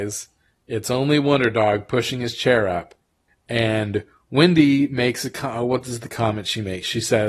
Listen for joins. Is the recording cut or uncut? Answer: uncut